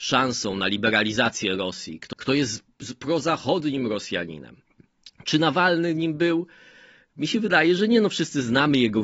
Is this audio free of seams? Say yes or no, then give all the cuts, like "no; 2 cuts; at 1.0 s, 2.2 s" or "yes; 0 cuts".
no; 2 cuts; at 2.1 s, 4.9 s